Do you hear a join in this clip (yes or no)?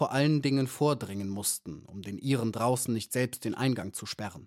no